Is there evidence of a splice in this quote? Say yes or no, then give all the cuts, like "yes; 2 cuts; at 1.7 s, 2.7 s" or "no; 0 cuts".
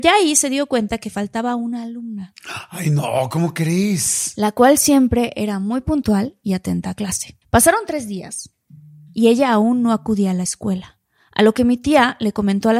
yes; 1 cut; at 7.4 s